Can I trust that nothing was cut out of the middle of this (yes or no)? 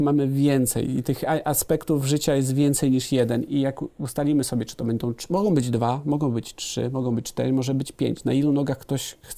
yes